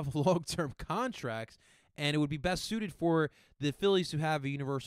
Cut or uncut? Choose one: uncut